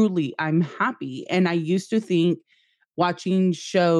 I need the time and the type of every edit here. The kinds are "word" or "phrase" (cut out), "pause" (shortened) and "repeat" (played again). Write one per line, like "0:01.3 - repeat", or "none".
none